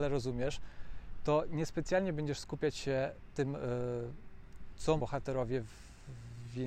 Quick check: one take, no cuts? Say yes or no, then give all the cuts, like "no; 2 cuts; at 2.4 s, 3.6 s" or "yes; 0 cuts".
no; 2 cuts; at 3.3 s, 5.0 s